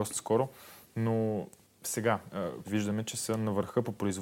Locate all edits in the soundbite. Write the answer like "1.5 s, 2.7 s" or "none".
2.6 s